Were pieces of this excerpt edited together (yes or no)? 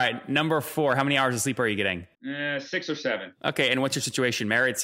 yes